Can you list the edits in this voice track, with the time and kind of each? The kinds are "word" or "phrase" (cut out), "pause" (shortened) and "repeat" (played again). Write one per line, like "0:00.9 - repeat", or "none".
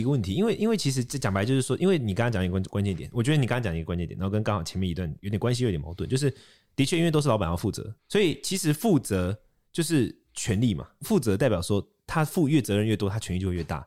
0:08.0 - pause

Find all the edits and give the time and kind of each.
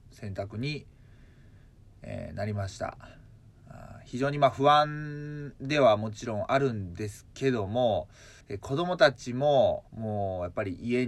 0:08.4 - pause
0:09.9 - pause

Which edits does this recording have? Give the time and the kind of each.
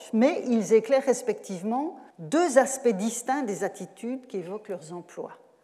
0:02.1 - pause

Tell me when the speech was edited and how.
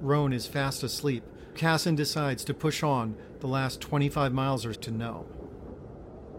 0:01.5 - word
0:04.7 - word

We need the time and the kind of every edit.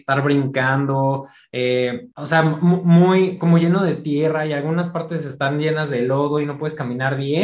0:02.1 - pause

